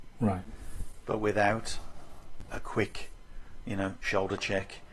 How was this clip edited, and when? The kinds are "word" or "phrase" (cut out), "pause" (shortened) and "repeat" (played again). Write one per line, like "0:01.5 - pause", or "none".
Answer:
none